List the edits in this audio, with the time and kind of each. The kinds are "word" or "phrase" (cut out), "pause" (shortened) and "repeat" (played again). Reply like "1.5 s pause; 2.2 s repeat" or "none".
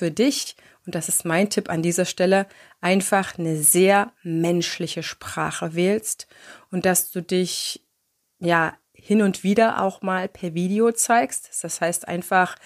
none

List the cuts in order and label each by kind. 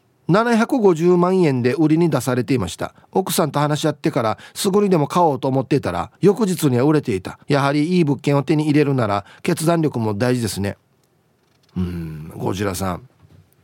3.0 s pause; 6.2 s pause; 7.4 s pause

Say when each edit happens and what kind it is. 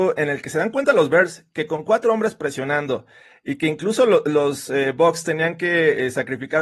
none

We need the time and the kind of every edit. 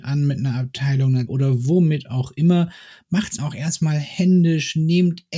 1.3 s word; 3.4 s word

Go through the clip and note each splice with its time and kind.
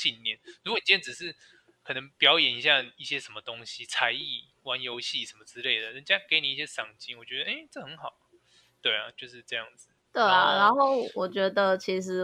2.1 s pause

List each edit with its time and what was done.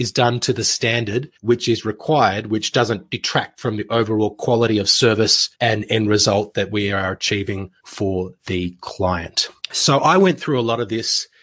1.3 s pause; 5.5 s pause; 7.8 s pause; 9.6 s pause

